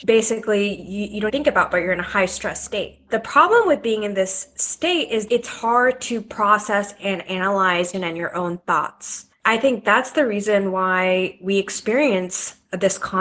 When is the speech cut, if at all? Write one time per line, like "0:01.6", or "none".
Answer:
0:01.3
0:05.3
0:07.9